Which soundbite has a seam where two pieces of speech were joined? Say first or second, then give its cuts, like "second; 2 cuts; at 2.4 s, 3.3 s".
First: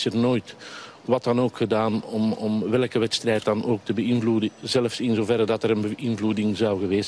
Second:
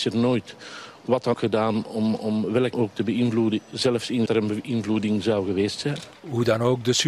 second; 3 cuts; at 1.3 s, 2.7 s, 4.3 s